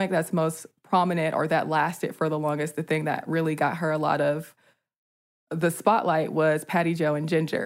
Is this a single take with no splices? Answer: yes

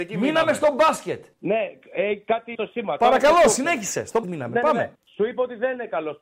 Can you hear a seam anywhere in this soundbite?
yes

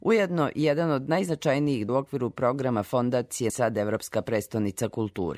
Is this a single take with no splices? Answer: no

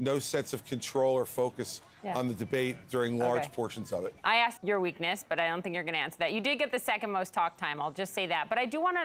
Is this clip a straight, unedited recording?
no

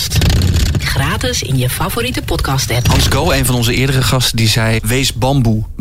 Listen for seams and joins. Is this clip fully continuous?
yes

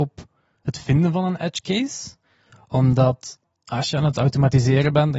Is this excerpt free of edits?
yes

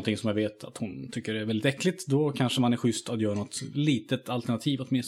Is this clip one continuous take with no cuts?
yes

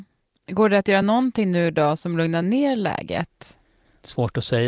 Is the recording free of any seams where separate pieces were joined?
yes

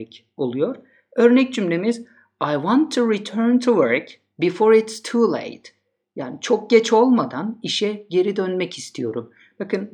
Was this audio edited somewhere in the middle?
no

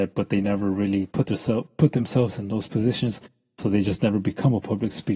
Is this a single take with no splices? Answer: yes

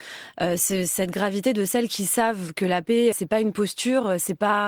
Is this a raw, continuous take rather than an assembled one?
no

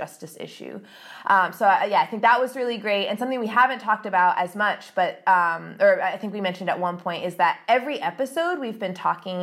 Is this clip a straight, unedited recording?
yes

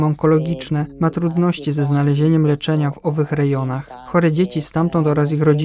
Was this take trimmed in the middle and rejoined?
no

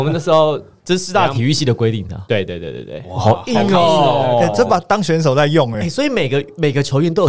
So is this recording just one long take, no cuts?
yes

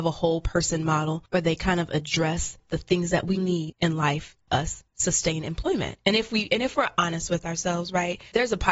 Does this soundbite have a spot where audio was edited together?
yes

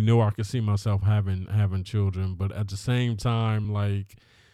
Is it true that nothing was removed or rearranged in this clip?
yes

